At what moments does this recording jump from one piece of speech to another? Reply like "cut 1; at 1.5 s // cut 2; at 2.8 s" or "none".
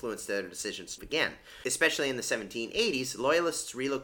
cut 1; at 1.0 s